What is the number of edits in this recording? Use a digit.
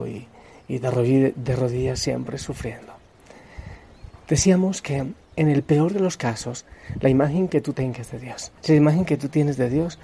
2